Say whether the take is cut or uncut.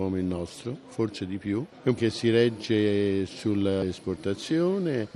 cut